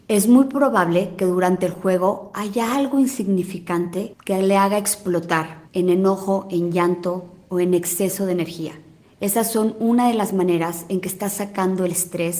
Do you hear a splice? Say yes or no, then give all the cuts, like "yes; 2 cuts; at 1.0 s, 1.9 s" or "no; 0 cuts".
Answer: yes; 2 cuts; at 5.6 s, 9.0 s